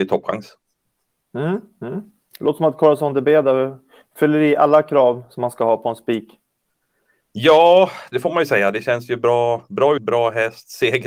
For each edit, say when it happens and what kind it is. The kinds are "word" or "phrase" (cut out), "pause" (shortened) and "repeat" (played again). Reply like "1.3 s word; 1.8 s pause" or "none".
10.0 s word